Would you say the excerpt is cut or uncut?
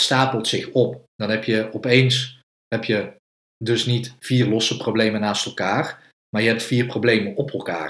uncut